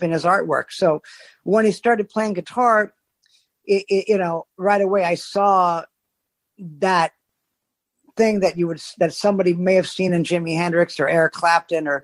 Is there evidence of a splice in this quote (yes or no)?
no